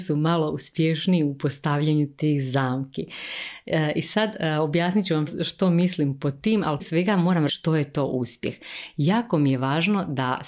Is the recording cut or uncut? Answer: cut